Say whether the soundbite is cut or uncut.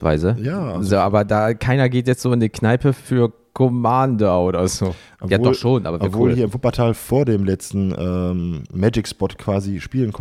uncut